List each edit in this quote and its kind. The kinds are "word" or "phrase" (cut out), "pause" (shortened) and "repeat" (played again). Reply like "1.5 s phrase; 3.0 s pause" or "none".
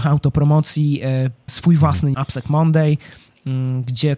1.5 s word; 2.1 s word